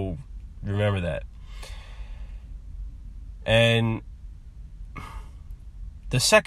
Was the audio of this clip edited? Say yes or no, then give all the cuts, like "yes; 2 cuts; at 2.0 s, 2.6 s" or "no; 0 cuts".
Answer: no; 0 cuts